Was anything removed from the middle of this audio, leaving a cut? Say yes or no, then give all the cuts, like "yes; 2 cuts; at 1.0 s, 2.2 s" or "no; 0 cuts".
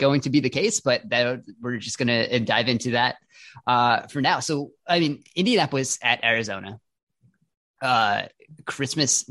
no; 0 cuts